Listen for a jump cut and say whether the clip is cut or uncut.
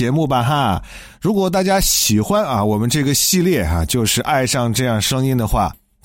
uncut